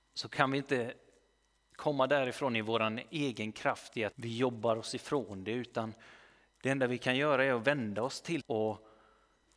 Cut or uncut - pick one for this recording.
cut